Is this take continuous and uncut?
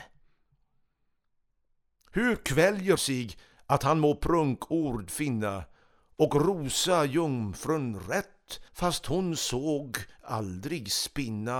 no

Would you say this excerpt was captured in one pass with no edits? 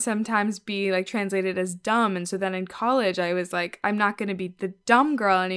yes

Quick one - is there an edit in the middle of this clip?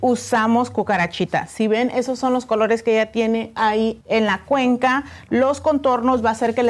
yes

